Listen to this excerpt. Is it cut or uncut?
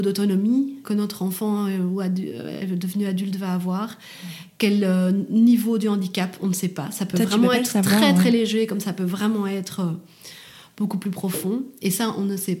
uncut